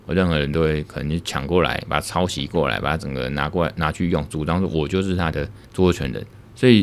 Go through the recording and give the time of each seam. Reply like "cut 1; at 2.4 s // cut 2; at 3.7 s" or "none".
cut 1; at 5.7 s